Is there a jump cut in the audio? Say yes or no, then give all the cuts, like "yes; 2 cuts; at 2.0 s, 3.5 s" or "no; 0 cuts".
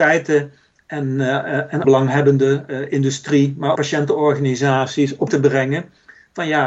yes; 3 cuts; at 1.8 s, 3.7 s, 5.3 s